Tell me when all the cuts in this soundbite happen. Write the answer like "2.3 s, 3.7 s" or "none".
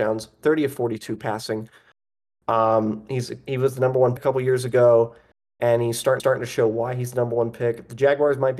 4.2 s, 6.2 s